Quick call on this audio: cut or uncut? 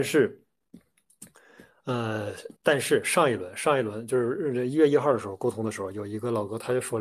cut